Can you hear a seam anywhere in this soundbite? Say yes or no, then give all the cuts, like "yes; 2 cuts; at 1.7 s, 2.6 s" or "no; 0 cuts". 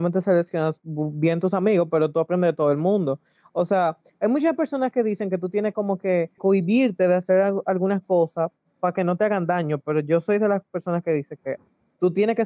yes; 1 cut; at 6.4 s